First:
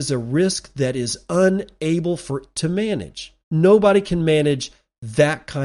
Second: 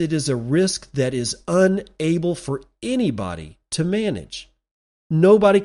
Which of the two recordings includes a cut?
first; 2 cuts; at 2.5 s, 3.4 s

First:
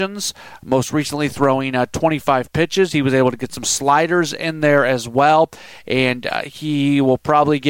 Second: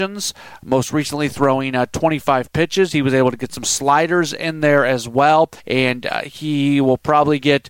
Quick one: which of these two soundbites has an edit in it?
second; 1 cut; at 5.6 s

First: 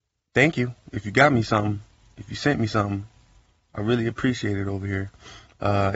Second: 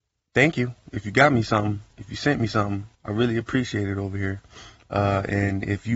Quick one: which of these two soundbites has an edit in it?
second; 2 cuts; at 1.9 s, 2.9 s

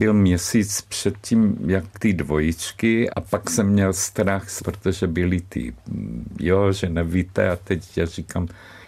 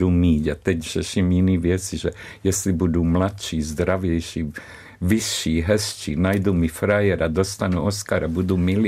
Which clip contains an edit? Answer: first; 3 cuts; at 1.9 s, 3.1 s, 4.6 s

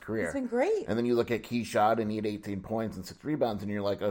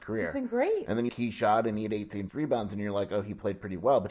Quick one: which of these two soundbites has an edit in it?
second; 2 cuts; at 1.1 s, 2.3 s

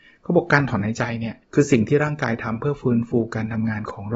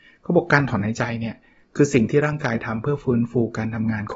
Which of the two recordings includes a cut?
first; 1 cut; at 1.4 s

